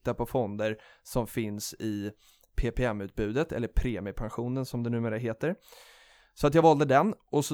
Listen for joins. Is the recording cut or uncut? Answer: uncut